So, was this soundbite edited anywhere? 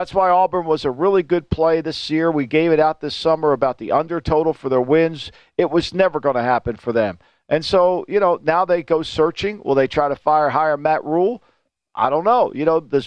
no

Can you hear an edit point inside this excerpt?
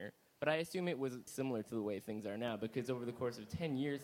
yes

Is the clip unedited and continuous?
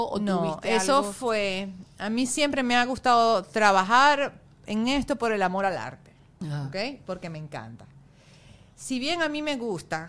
yes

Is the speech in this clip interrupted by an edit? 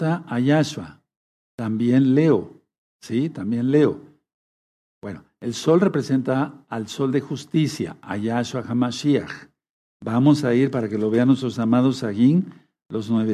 no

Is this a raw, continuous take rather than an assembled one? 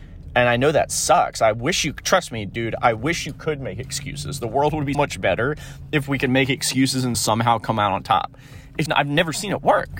no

